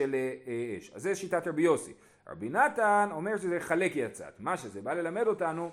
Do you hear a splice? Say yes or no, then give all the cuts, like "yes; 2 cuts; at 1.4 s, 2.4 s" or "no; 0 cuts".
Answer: no; 0 cuts